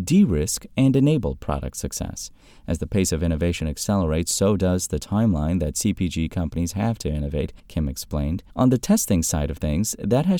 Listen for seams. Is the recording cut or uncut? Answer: cut